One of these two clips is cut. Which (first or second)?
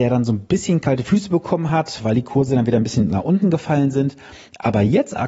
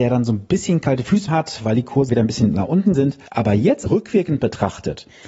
second